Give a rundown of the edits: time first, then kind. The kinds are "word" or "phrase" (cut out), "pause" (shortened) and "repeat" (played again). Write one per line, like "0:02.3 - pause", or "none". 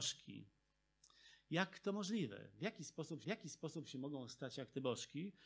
0:03.2 - repeat